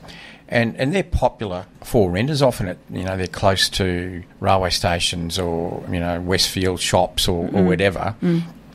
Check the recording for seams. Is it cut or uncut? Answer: cut